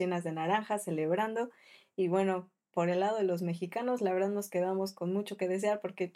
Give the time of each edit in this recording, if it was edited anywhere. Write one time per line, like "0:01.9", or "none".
none